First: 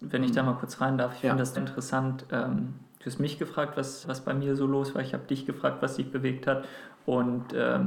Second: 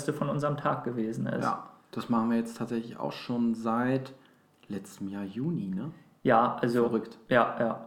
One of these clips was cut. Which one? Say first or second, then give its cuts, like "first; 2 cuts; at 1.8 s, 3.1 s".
first; 2 cuts; at 1.6 s, 4.0 s